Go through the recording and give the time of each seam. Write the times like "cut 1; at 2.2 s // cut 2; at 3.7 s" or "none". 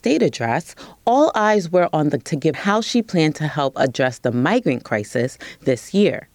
cut 1; at 2.2 s // cut 2; at 2.5 s